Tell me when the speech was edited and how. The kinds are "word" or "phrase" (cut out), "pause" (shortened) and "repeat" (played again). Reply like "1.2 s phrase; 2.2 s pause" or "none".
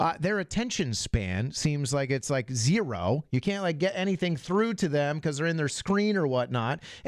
none